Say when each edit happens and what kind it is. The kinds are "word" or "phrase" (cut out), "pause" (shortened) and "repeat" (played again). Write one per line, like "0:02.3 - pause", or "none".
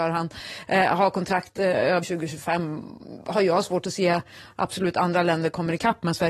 0:02.0 - word